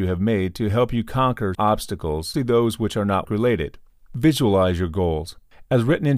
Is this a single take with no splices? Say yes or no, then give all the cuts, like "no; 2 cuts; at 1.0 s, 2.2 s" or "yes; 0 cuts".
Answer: no; 3 cuts; at 1.5 s, 2.3 s, 3.2 s